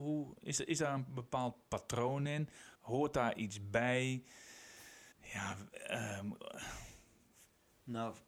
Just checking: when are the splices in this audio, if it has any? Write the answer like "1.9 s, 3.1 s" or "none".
2.7 s, 5.1 s